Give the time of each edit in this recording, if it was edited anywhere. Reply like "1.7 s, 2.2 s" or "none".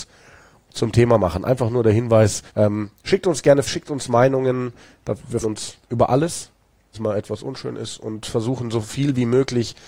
2.5 s, 3.7 s, 5.4 s, 5.8 s, 6.9 s